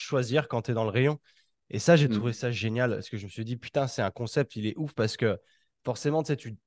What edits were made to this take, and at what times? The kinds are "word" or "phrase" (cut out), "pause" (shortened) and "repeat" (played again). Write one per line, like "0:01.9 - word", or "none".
none